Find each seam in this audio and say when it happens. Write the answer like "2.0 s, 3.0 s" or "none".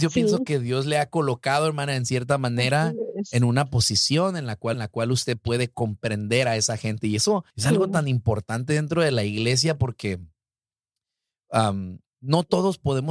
4.7 s, 7.5 s, 12.1 s

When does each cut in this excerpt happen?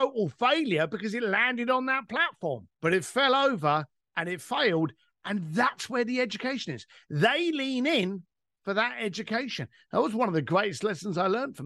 2.7 s

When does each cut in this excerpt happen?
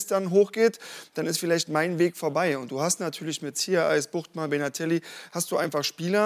none

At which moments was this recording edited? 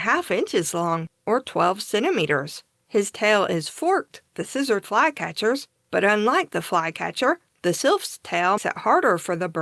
2.7 s, 4.3 s, 4.8 s, 8.6 s

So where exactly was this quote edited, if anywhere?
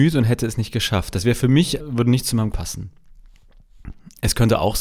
1.8 s, 2.5 s

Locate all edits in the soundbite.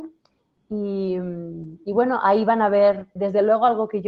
3.2 s

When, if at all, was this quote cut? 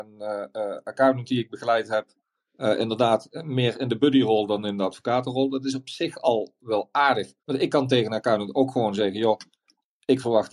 7.4 s

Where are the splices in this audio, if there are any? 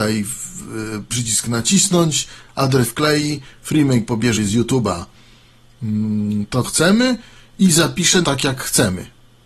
1.1 s, 2.8 s, 4.4 s, 6.6 s, 8.2 s

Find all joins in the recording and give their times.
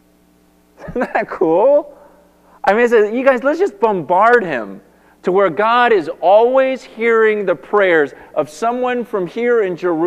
none

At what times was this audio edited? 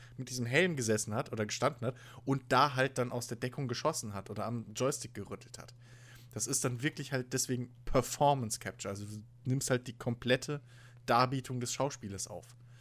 none

